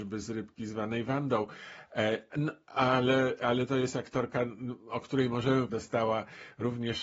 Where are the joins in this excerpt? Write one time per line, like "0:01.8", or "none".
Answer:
0:05.7